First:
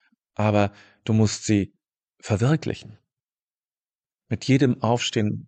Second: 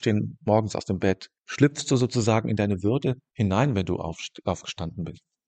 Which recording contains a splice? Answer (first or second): second